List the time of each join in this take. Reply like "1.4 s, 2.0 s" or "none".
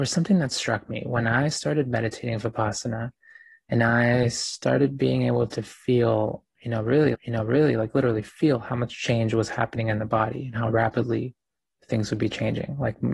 7.1 s